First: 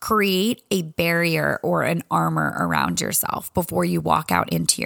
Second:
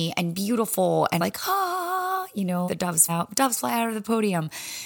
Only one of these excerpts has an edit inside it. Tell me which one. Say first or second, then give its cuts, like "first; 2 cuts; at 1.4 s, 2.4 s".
second; 3 cuts; at 1.2 s, 2.7 s, 3.1 s